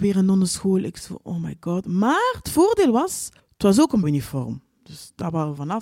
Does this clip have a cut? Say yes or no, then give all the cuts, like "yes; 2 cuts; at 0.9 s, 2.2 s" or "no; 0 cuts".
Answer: yes; 2 cuts; at 3.4 s, 4.0 s